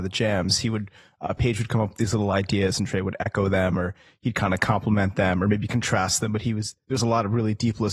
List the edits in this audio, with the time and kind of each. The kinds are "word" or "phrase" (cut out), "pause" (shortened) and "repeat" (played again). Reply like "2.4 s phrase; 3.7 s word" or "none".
none